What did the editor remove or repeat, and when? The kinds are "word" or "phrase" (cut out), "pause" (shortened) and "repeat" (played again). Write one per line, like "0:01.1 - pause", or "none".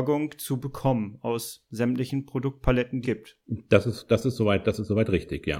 0:03.0 - word